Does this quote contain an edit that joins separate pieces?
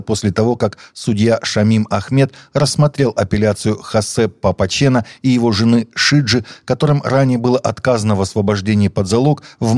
no; 0 cuts

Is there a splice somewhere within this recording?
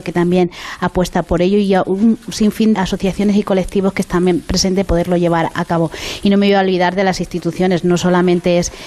yes; 4 cuts; at 1.2 s, 2.7 s, 4.9 s, 5.5 s

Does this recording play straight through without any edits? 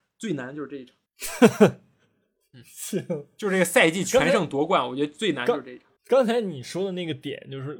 no; 2 cuts; at 1.1 s, 6.0 s

